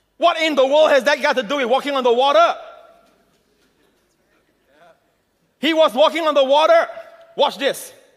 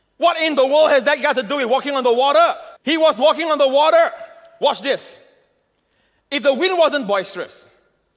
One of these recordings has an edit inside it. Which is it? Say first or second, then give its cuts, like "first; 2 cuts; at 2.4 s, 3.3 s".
second; 1 cut; at 2.8 s